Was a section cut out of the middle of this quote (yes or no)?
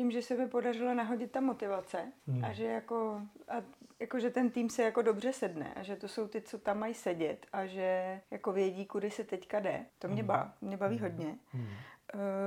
yes